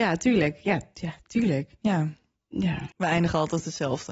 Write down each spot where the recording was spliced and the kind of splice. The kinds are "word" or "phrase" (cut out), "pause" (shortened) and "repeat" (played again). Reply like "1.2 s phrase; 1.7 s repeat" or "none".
2.9 s pause